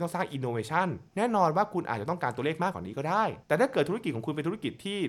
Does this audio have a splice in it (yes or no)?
yes